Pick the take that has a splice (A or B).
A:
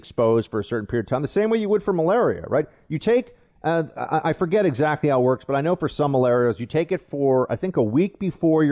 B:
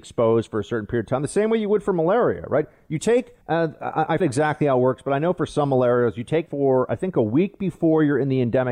B